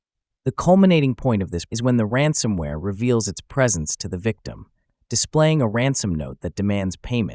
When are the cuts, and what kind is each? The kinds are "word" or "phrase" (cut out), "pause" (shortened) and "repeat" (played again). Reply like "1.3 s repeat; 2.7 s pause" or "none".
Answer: 1.7 s word